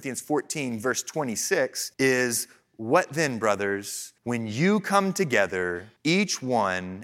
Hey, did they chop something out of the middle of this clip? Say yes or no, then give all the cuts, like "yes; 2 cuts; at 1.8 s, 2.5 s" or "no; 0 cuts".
yes; 3 cuts; at 1.9 s, 4.2 s, 6.0 s